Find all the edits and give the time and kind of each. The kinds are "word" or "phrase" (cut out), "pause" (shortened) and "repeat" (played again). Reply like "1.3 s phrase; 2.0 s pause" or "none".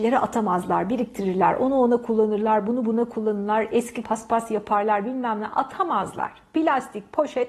4.0 s word